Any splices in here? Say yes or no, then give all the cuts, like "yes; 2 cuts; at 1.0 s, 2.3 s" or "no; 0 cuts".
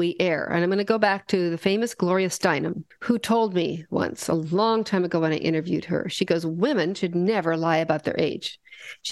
no; 0 cuts